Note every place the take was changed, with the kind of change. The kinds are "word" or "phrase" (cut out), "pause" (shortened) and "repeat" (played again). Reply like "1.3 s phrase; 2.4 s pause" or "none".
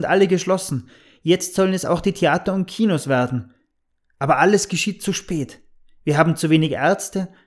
none